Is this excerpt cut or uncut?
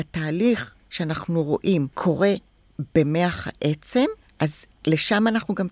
cut